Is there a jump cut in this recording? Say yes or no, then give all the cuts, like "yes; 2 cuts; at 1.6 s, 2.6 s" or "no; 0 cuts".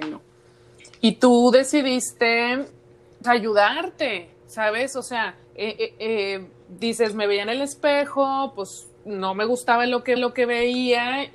yes; 4 cuts; at 3.2 s, 5.4 s, 9.0 s, 10.2 s